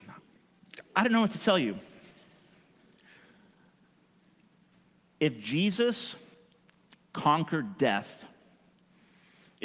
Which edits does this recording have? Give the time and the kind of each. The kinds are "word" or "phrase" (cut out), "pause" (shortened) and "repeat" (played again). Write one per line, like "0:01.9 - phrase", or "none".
none